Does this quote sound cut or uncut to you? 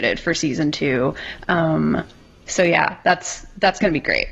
uncut